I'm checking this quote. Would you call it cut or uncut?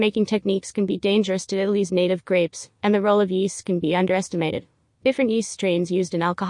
uncut